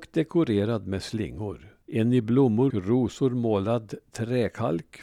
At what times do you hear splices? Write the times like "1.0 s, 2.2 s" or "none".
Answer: 1.8 s, 2.7 s